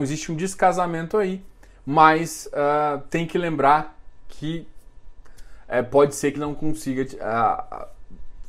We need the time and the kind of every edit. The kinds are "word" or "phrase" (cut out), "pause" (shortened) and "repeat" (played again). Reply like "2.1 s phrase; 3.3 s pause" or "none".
6.4 s word